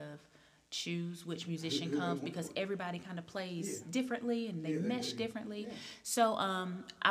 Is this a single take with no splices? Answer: yes; 0 cuts

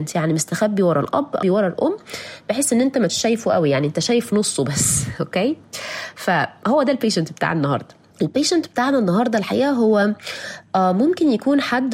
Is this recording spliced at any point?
yes; 3 cuts; at 1.4 s, 3.1 s, 8.1 s

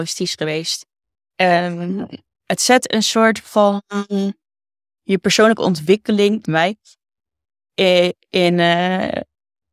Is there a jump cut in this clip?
yes; 2 cuts; at 2.2 s, 6.4 s

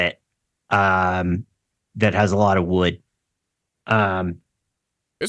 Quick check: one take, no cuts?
yes; 0 cuts

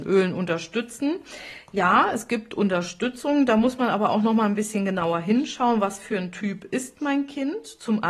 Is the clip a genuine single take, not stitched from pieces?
yes; 0 cuts

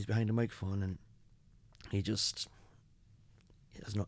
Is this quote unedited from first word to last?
yes; 0 cuts

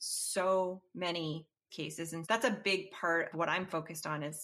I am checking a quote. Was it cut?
yes; 3 cuts; at 1.7 s, 2.2 s, 3.3 s

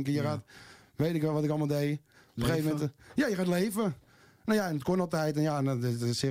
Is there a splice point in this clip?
no; 0 cuts

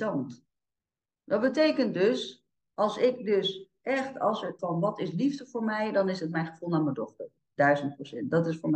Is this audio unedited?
no; 1 cut; at 4.6 s

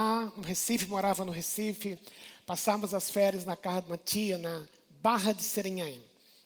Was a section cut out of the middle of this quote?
no; 0 cuts

